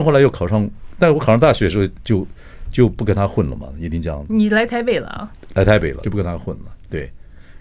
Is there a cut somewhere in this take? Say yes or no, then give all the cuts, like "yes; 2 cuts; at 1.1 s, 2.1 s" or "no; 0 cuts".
yes; 1 cut; at 6.0 s